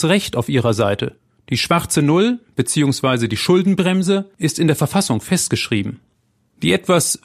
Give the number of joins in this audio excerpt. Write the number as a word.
zero